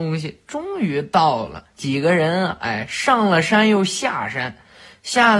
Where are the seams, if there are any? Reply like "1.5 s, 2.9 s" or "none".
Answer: 1.7 s